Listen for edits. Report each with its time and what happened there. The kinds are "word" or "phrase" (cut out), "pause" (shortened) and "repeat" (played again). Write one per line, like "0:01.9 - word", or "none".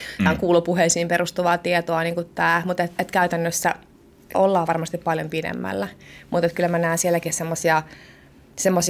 0:03.0 - word
0:04.3 - word